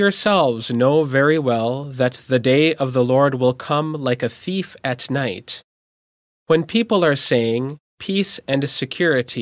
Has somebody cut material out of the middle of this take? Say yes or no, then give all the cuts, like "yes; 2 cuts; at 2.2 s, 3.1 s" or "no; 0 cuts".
no; 0 cuts